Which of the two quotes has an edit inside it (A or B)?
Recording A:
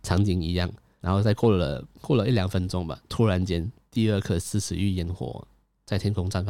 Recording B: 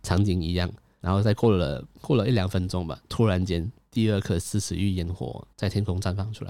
B